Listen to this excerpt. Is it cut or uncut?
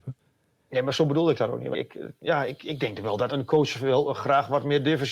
cut